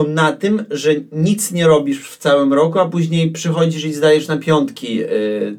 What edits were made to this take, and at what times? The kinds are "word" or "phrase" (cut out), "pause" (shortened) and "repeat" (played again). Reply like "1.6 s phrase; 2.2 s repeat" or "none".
none